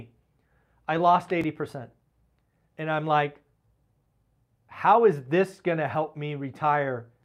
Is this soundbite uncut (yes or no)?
yes